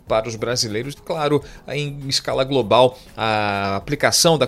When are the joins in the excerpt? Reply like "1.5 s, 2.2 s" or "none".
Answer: 0.9 s

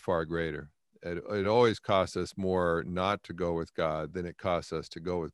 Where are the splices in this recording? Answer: none

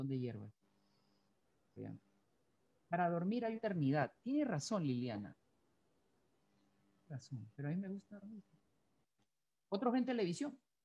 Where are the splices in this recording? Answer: 1.8 s, 3.6 s, 7.5 s

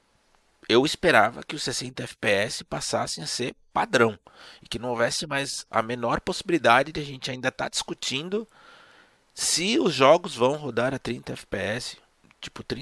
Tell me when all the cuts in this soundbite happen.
none

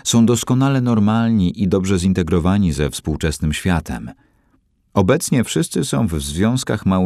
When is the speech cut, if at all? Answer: none

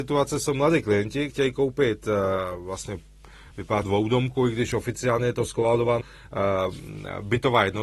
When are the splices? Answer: 1.3 s, 3.8 s, 6.0 s

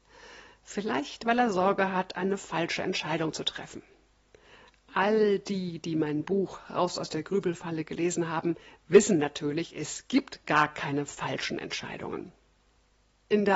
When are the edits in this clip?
none

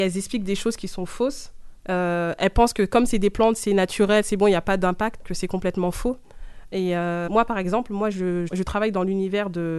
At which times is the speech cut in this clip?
5.2 s, 7.3 s, 8.5 s

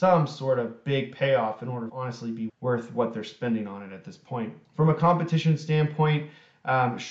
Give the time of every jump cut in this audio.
1.9 s, 2.5 s, 4.6 s

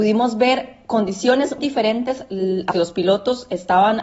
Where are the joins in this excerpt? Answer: 1.6 s, 2.7 s

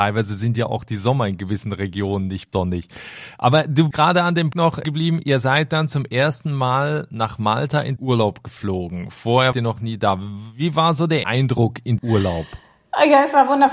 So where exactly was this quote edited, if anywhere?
2.5 s, 3.9 s, 4.5 s, 4.8 s, 8.0 s, 9.5 s, 11.2 s, 12.0 s

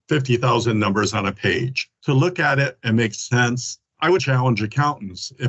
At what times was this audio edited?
4.2 s

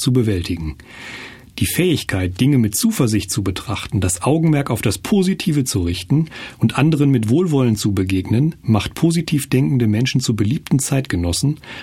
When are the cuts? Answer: none

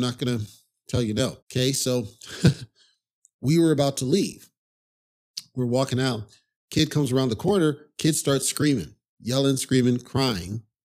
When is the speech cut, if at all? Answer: 1.4 s

